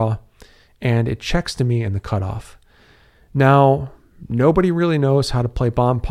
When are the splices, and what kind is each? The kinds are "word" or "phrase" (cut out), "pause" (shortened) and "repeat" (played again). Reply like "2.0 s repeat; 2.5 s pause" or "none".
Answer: none